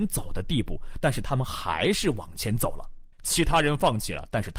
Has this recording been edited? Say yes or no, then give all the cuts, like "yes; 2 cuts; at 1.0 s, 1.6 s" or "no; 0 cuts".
yes; 1 cut; at 3.1 s